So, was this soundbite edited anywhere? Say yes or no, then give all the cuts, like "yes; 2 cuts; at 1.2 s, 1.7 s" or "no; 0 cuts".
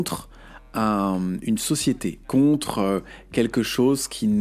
yes; 1 cut; at 2.2 s